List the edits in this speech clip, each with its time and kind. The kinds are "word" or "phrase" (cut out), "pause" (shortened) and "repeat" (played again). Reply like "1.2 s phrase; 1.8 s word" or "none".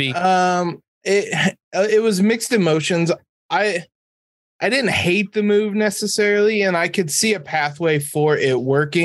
none